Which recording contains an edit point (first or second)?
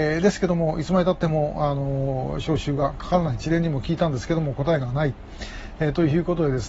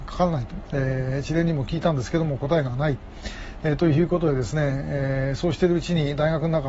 first